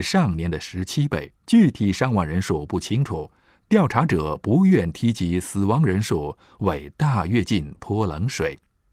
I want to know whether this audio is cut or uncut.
cut